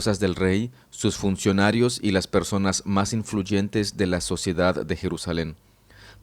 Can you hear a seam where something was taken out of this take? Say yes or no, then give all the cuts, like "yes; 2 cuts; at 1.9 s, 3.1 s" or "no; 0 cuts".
no; 0 cuts